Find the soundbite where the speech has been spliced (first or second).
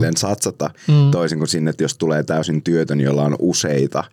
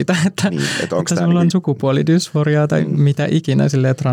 second